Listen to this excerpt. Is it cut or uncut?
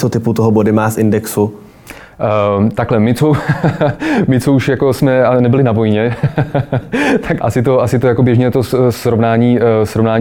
cut